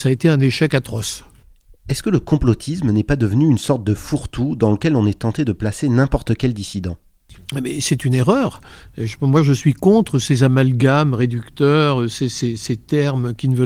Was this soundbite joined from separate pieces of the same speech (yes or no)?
no